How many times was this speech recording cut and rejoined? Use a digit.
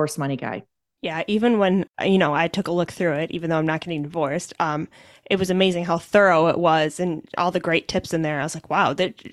1